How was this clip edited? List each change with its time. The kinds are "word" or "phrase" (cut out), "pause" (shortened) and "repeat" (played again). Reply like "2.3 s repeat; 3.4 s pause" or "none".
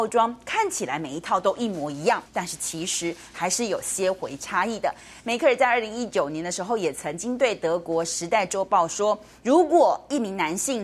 2.3 s pause